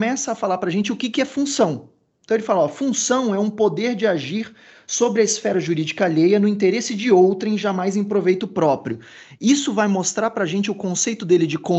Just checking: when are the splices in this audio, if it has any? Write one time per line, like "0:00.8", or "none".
none